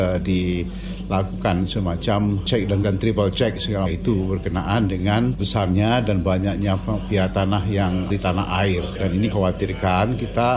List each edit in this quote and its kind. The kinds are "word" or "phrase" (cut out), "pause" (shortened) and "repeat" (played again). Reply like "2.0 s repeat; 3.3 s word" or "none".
2.8 s word; 3.9 s word; 5.4 s word; 8.1 s word; 9.3 s word

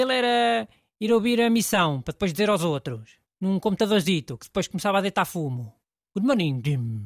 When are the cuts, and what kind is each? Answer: none

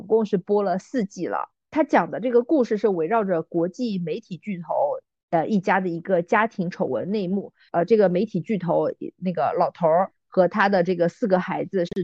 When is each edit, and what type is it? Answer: none

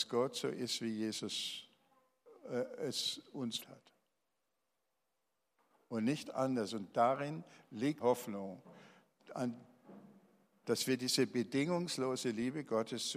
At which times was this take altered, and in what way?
3.6 s word; 8.0 s word

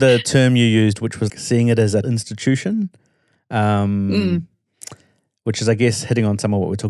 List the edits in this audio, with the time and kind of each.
1.3 s word; 2.0 s word

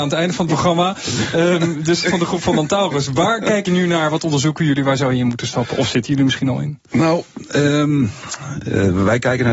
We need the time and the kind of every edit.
2.0 s phrase; 3.7 s word

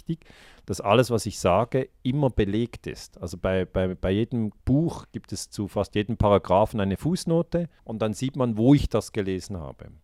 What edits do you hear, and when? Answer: 4.6 s pause; 7.8 s pause

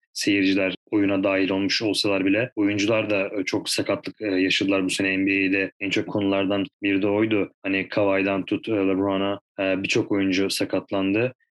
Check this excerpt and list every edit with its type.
3.6 s phrase; 6.1 s word; 9.5 s pause

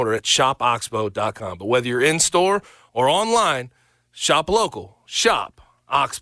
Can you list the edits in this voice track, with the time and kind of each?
none

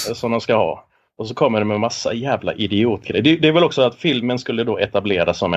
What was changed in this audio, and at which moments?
none

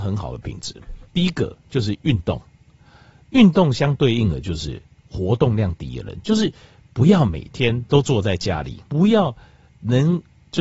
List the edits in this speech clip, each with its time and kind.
1.0 s pause; 8.9 s pause

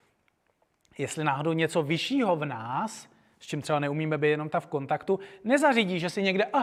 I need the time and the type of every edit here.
none

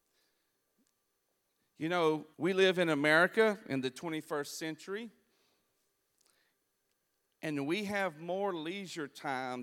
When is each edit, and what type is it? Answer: 2.3 s pause

